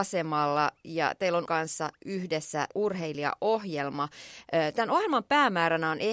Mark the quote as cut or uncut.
cut